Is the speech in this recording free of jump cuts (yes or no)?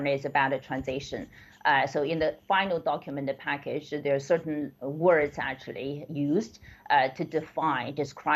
yes